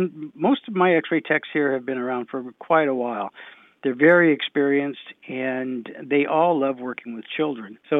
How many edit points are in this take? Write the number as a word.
zero